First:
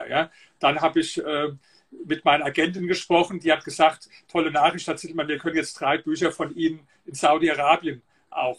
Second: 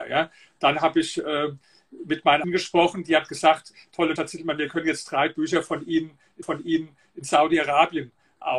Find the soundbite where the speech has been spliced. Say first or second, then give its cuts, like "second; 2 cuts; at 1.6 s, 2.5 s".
second; 3 cuts; at 2.4 s, 4.2 s, 6.4 s